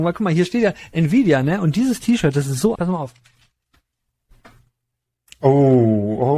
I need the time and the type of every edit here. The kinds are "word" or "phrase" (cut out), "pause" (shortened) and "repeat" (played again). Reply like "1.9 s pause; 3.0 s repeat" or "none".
2.8 s word